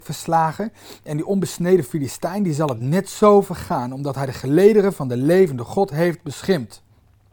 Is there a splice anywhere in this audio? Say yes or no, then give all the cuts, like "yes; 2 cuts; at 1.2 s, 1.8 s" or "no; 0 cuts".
no; 0 cuts